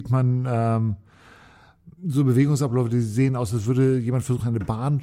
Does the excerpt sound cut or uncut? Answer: cut